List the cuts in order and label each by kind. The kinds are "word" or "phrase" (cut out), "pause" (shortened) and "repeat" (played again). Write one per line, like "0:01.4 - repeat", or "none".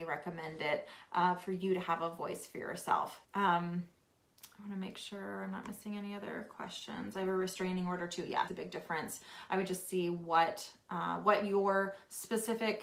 0:03.2 - pause
0:08.5 - phrase